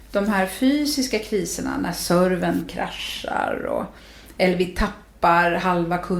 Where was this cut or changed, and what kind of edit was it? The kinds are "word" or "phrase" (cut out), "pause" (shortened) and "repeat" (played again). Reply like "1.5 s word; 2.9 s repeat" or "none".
none